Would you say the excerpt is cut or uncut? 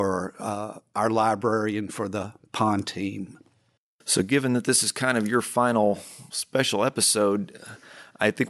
uncut